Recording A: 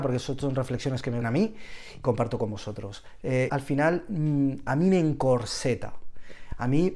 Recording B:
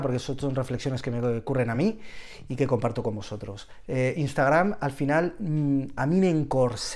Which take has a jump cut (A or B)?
A